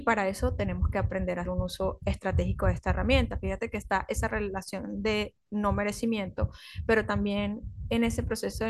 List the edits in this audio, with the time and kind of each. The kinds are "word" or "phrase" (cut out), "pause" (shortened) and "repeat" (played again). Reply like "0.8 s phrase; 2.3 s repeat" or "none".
1.4 s word